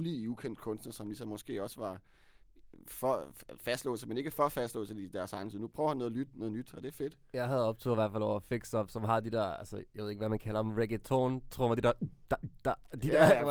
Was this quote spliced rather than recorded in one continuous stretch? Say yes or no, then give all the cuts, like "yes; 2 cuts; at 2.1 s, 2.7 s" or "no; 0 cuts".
no; 0 cuts